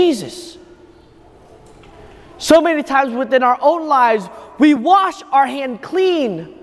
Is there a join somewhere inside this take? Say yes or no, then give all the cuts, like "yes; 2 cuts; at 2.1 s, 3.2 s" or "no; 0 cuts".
no; 0 cuts